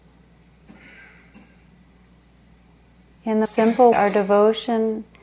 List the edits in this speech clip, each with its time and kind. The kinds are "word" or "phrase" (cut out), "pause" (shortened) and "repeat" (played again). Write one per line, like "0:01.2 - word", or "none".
0:03.4 - word
0:03.9 - word